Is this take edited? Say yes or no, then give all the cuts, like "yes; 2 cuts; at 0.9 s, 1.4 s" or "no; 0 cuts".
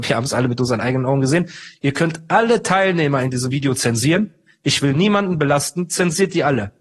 no; 0 cuts